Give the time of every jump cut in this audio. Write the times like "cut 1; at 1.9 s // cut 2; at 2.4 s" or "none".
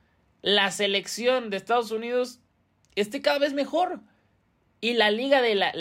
none